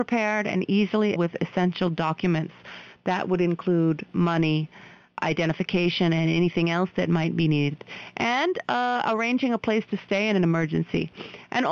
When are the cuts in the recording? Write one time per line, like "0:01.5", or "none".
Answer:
0:01.2